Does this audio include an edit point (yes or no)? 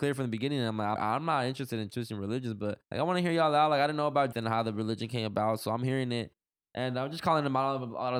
yes